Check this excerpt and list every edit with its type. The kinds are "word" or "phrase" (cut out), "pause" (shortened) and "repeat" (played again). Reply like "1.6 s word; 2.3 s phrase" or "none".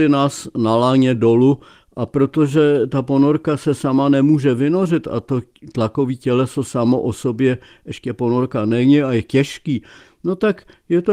none

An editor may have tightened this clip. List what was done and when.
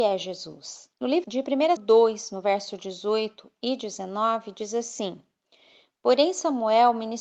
0.9 s pause; 1.2 s word; 1.8 s phrase

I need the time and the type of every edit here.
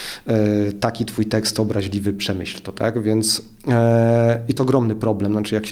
1.5 s word; 4.6 s word

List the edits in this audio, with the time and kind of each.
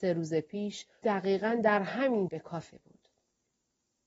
1.0 s word; 2.3 s word; 2.7 s word

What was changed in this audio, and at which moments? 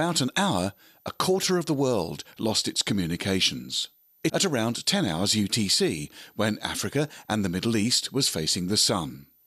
4.3 s word

